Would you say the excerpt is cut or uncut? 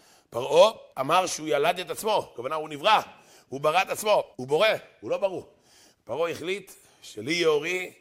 cut